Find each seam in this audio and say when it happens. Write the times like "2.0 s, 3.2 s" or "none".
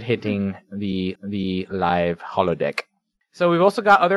1.2 s